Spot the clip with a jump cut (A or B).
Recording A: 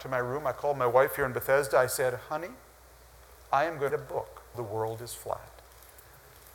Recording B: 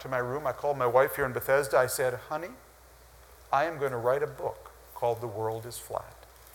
A